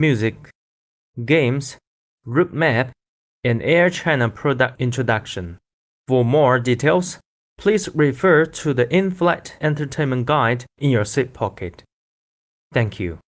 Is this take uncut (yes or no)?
yes